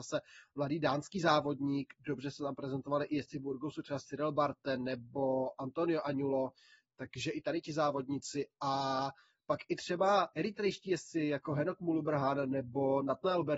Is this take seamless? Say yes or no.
yes